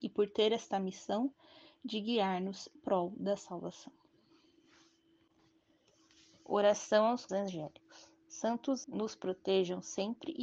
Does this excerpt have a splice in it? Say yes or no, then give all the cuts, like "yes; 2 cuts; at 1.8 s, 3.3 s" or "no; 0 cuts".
yes; 3 cuts; at 2.8 s, 7.3 s, 8.8 s